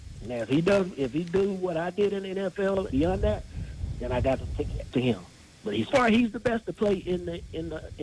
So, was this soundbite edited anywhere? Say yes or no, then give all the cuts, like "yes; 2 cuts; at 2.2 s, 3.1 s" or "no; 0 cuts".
yes; 3 cuts; at 2.9 s, 4.9 s, 5.9 s